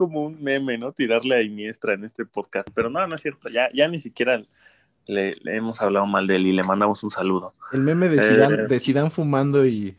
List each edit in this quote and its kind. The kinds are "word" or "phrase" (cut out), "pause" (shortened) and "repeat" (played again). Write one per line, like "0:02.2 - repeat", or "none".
none